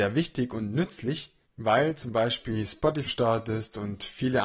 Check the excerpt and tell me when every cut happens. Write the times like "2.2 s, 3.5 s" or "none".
3.1 s